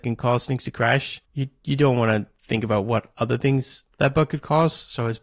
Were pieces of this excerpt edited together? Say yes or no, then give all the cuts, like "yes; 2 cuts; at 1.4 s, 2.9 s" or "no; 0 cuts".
yes; 1 cut; at 1.2 s